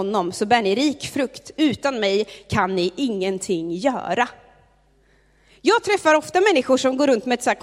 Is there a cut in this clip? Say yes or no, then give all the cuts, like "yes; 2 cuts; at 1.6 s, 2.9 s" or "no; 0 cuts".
no; 0 cuts